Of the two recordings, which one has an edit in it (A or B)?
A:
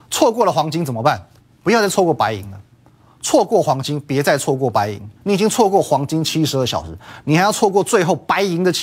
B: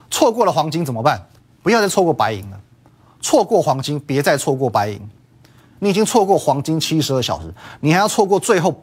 A